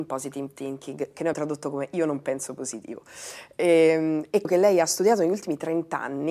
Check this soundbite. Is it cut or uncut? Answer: cut